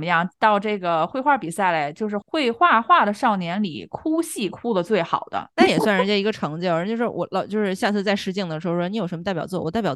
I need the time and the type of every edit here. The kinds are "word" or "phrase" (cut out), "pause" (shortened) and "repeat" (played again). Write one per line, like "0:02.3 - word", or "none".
0:05.5 - pause